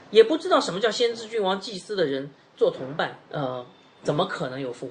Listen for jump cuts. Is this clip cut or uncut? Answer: cut